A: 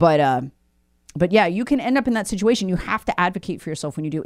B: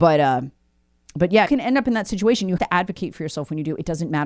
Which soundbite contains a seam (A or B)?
B